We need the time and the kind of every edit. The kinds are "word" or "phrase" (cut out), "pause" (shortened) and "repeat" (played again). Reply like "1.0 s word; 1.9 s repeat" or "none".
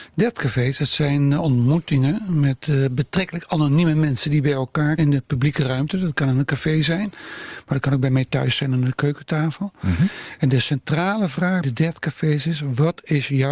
5.0 s word; 11.6 s word

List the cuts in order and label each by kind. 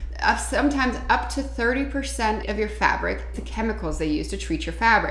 2.4 s phrase; 3.3 s word

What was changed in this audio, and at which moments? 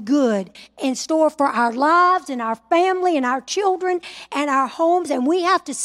none

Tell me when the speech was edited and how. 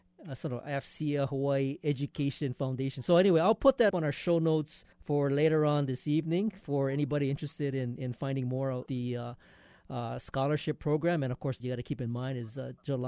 3.9 s word; 4.9 s pause; 8.9 s word; 11.6 s phrase

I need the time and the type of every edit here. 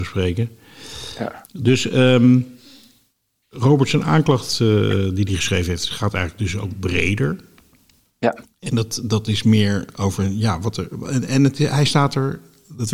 none

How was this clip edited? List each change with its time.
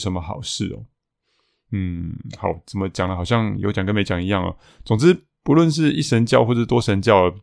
none

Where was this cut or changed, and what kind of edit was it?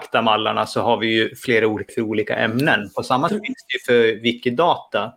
1.9 s word; 3.3 s word

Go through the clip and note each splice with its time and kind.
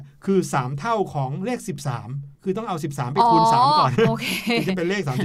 2.4 s pause

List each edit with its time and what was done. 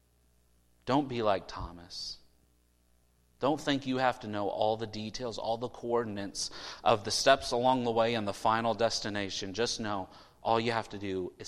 none

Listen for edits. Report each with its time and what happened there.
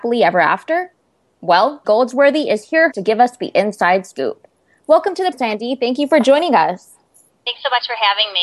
1.8 s word; 2.9 s word; 5.3 s word

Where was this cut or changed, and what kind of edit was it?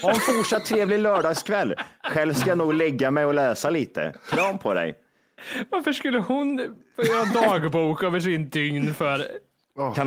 none

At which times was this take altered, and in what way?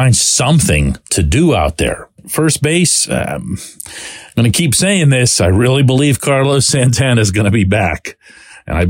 1.0 s pause; 2.2 s pause

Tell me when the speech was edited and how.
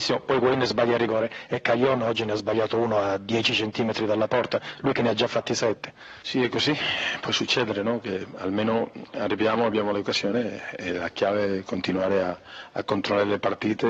none

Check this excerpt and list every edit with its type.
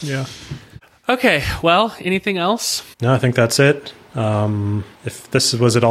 2.9 s pause; 4.9 s pause

